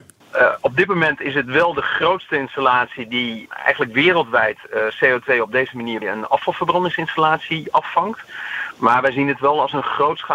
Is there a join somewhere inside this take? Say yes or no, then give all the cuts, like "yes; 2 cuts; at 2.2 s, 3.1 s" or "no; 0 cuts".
yes; 1 cut; at 6.0 s